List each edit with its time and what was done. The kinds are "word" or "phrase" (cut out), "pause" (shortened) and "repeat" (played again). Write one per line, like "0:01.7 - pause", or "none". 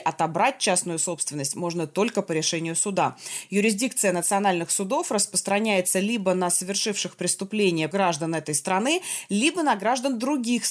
0:07.9 - word